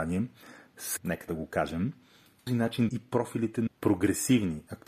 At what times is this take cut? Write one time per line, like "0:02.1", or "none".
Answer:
0:01.0
0:01.3
0:02.5
0:02.9
0:03.7